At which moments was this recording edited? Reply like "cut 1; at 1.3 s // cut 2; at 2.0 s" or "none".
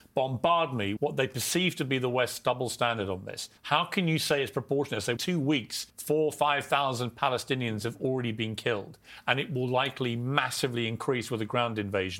cut 1; at 1.0 s // cut 2; at 3.6 s // cut 3; at 5.2 s // cut 4; at 5.9 s